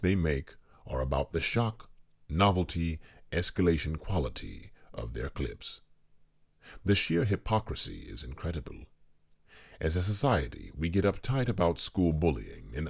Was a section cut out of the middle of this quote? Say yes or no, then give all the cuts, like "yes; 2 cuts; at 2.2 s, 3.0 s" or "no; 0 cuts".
no; 0 cuts